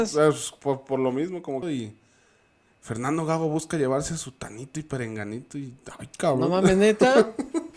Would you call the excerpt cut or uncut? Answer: cut